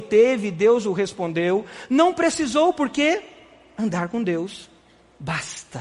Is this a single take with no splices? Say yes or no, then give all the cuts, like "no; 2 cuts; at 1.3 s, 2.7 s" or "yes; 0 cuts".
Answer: yes; 0 cuts